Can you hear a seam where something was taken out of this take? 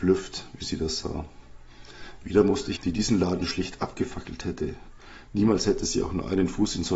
yes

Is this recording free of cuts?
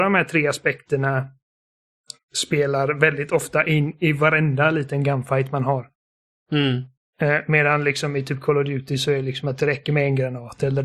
yes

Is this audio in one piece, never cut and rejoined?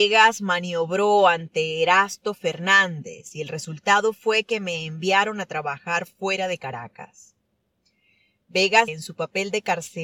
no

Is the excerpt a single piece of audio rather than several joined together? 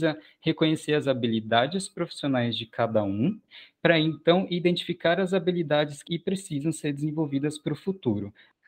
no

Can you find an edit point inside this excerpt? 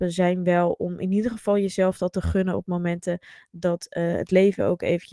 no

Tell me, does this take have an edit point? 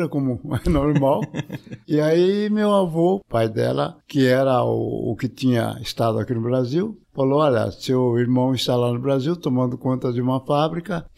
yes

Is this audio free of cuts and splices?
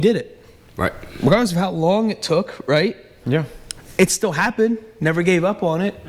yes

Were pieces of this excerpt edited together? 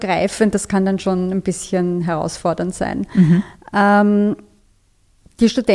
no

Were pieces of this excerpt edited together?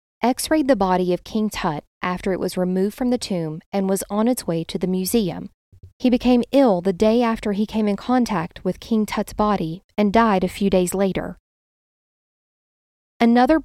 no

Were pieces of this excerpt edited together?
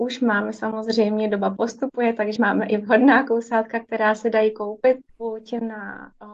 yes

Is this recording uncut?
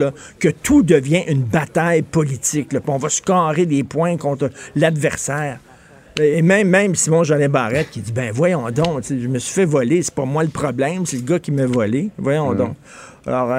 yes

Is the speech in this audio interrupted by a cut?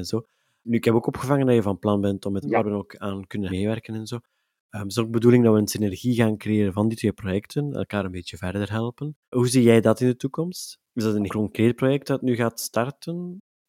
yes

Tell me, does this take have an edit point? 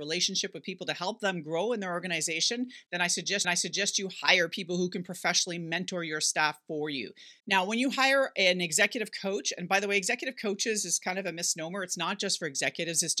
yes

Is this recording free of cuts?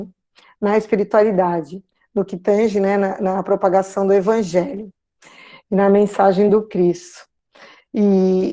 yes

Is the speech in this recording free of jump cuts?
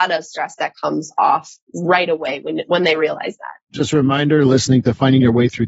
no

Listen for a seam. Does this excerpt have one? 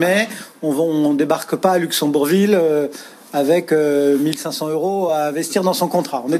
no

